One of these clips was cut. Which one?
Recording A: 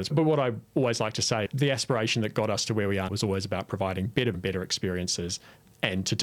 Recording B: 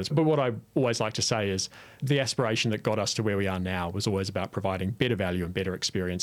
A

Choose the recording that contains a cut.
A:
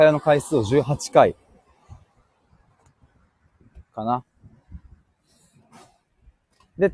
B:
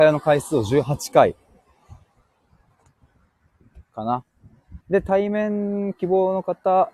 B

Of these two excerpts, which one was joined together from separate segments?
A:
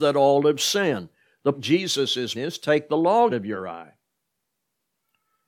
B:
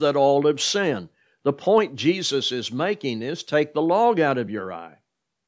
A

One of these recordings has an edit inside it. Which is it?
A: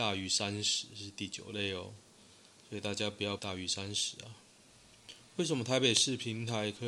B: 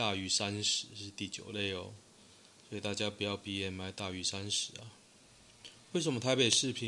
A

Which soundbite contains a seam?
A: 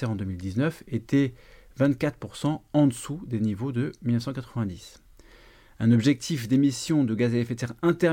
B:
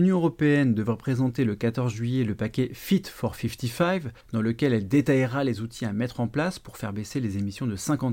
B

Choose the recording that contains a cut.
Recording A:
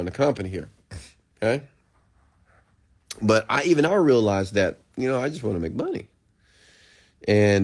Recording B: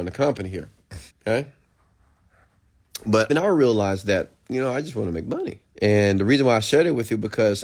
B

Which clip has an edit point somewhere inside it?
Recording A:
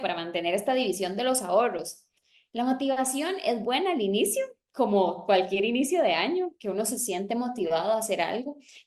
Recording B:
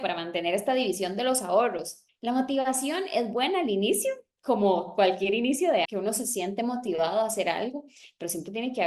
B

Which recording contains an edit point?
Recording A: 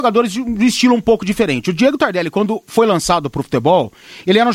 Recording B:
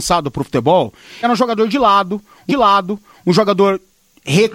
B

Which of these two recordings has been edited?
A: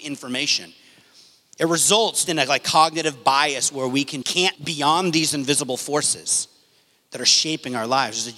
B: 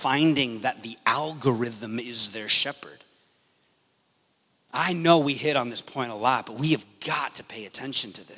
A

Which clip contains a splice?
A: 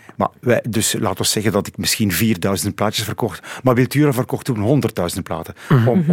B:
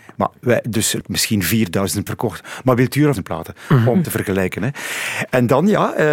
B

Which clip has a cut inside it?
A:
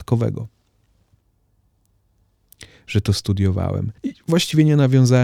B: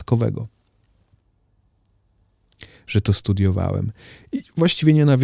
A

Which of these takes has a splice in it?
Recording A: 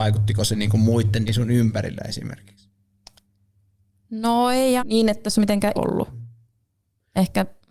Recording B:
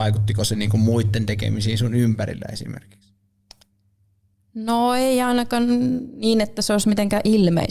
A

